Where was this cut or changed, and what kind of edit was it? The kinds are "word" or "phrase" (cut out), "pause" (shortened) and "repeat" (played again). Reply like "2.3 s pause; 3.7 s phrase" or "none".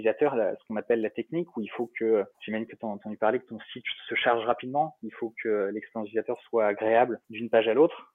2.3 s pause; 7.2 s pause